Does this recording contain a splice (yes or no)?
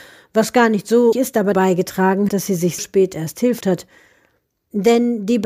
yes